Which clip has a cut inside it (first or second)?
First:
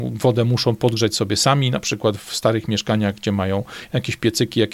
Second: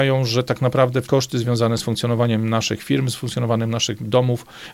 second